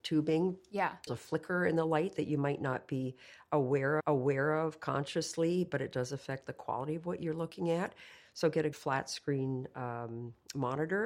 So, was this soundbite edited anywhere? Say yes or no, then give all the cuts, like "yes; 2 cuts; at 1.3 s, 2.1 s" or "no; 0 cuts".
yes; 3 cuts; at 1.1 s, 4.0 s, 8.7 s